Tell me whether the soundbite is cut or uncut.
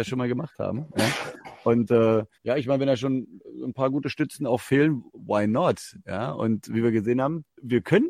cut